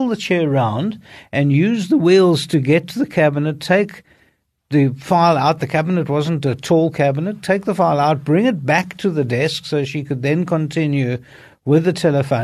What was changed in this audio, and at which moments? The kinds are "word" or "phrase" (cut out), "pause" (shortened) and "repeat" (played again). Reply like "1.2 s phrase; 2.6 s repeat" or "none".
none